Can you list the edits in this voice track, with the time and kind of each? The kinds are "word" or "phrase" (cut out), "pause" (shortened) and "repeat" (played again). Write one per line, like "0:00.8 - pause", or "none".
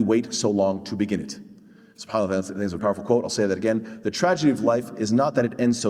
0:02.8 - word